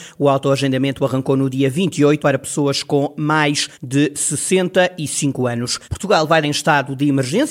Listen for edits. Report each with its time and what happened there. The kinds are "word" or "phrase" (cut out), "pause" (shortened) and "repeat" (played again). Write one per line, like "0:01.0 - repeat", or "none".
0:02.2 - word
0:03.7 - pause
0:05.8 - pause
0:06.4 - phrase